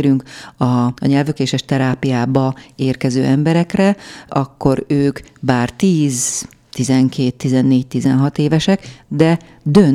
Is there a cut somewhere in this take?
yes; 1 cut; at 1.0 s

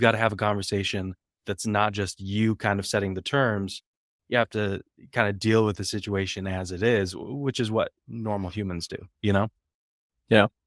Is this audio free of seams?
yes; 0 cuts

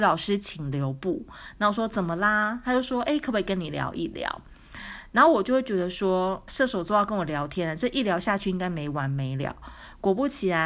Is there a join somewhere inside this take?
yes; 1 cut; at 6.5 s

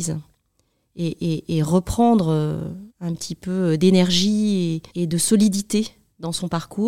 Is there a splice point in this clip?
yes; 2 cuts; at 2.9 s, 4.9 s

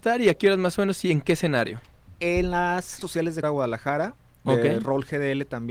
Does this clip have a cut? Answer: yes; 2 cuts; at 3.0 s, 3.4 s

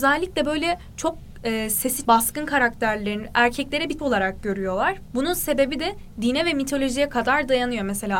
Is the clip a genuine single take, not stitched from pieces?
no; 3 cuts; at 2.0 s, 4.0 s, 5.1 s

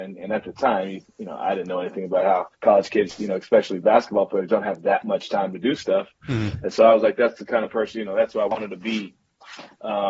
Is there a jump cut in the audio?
yes; 1 cut; at 2.5 s

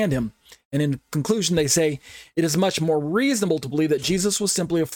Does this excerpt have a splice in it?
no; 0 cuts

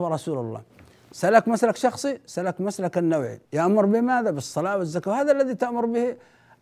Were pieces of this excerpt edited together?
yes; 1 cut; at 3.4 s

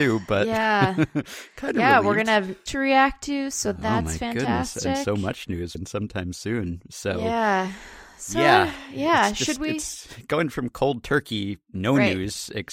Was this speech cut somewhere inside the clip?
yes; 2 cuts; at 2.7 s, 5.7 s

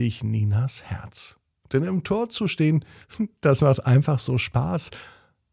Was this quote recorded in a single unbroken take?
yes; 0 cuts

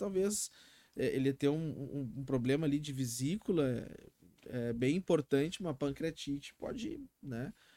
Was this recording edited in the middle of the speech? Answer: no; 0 cuts

